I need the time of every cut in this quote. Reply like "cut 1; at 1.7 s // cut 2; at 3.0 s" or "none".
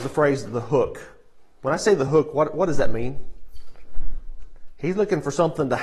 none